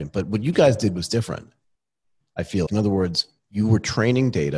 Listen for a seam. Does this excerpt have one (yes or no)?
yes